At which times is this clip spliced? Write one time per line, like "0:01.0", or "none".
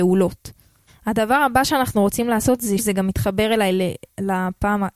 0:02.8